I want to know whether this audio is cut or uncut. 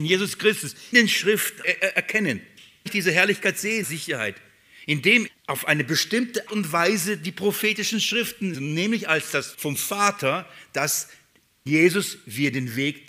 cut